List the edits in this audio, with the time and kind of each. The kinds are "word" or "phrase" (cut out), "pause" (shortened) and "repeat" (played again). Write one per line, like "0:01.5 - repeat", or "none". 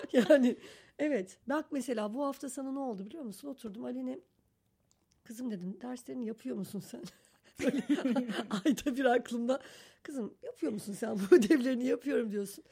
0:01.4 - pause